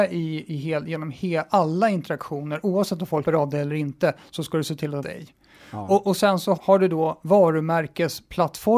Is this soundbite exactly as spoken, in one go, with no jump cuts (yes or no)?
no